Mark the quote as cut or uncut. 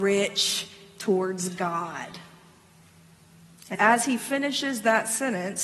cut